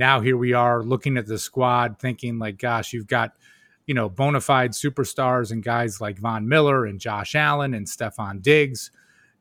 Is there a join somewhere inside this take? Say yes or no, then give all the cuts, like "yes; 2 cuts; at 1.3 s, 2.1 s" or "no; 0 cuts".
no; 0 cuts